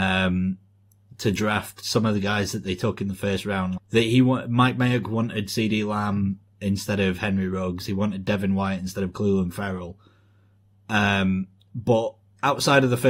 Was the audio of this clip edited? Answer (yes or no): yes